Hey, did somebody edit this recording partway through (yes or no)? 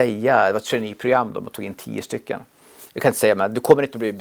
yes